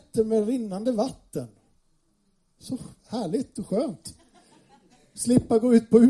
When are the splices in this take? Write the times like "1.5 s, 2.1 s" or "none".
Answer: none